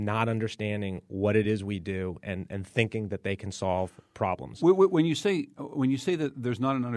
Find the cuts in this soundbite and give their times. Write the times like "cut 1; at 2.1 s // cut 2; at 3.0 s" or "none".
none